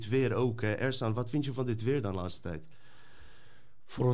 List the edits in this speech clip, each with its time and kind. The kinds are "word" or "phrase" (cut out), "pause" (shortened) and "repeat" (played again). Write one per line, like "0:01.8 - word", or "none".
none